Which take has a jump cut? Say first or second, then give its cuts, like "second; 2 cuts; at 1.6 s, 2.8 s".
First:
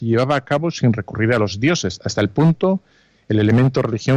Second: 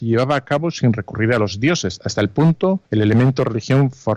second; 1 cut; at 2.9 s